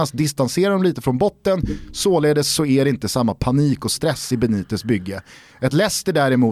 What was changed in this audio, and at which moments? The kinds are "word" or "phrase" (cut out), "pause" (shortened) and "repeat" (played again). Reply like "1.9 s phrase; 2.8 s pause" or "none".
none